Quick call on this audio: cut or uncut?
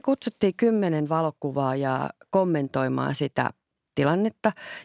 uncut